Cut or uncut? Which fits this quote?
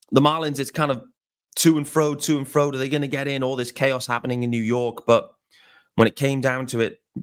uncut